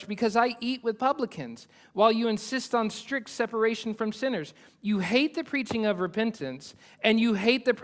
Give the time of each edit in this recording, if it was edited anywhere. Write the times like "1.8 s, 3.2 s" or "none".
none